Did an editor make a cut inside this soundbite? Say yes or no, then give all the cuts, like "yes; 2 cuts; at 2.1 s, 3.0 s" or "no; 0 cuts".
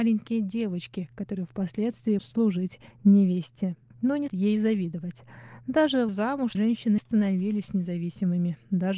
yes; 5 cuts; at 2.2 s, 4.3 s, 6.1 s, 6.5 s, 7.0 s